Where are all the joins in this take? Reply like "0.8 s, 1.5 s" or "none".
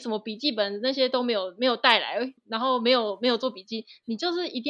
2.4 s